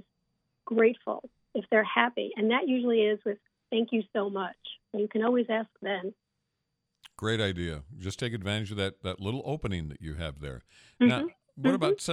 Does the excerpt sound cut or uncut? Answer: cut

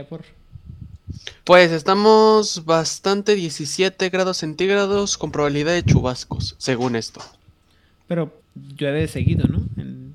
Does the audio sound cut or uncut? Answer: cut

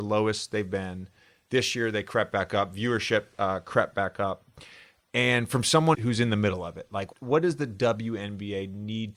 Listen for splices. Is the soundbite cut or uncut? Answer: cut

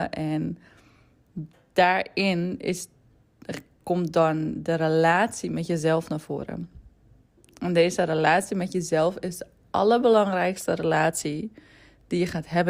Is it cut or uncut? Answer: uncut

